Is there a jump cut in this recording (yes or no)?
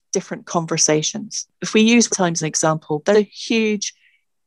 yes